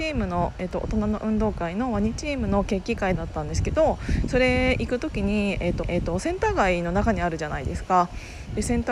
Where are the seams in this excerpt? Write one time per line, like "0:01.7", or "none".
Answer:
0:05.8